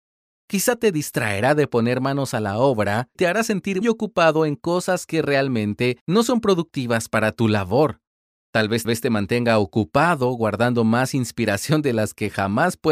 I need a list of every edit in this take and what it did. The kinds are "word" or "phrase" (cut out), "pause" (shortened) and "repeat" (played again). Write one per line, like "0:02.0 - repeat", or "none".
0:03.2 - word
0:03.8 - word
0:08.8 - repeat